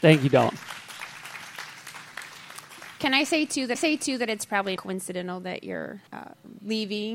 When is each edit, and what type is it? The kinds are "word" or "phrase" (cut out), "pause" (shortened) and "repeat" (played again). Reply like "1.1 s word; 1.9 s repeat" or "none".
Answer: 3.7 s repeat; 4.8 s word; 6.1 s pause